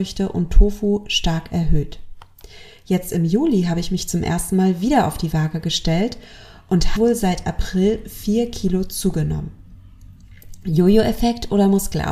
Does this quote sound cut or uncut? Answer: cut